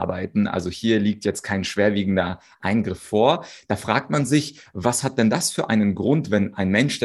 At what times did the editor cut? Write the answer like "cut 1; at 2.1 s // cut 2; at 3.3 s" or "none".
none